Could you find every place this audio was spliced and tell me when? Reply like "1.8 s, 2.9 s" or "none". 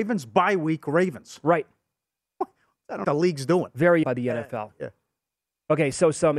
3.0 s, 4.0 s